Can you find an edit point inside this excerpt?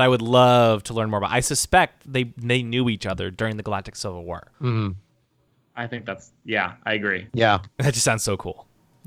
yes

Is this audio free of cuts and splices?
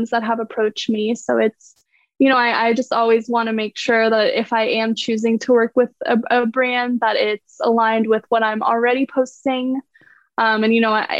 yes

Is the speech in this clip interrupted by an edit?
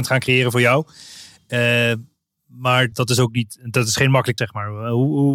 yes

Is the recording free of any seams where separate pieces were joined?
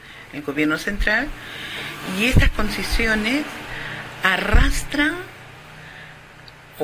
yes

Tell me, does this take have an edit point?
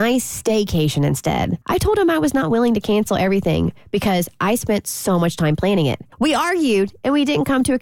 yes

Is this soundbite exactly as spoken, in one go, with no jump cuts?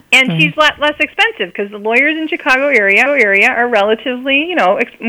no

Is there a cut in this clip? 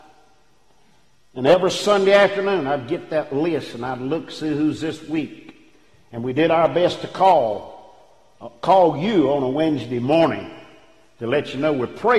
no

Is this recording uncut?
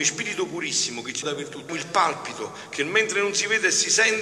no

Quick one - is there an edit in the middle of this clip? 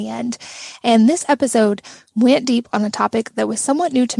no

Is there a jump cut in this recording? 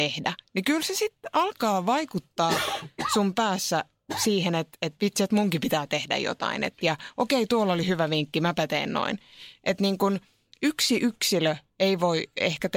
no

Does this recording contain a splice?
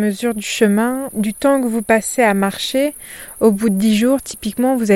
no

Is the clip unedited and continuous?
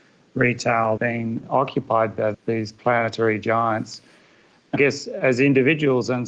no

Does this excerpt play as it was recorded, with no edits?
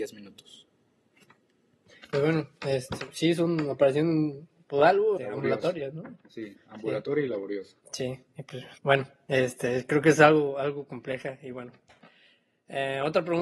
no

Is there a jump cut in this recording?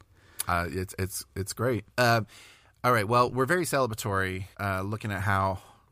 yes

